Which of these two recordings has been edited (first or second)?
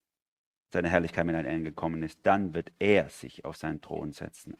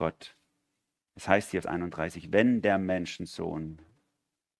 second